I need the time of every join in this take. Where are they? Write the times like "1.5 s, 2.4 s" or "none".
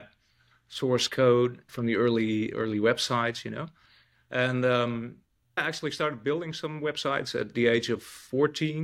1.7 s, 5.6 s